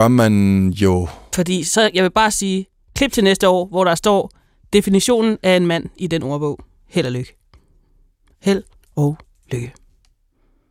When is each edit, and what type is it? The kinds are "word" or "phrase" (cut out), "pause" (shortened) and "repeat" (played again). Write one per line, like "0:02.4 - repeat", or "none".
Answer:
none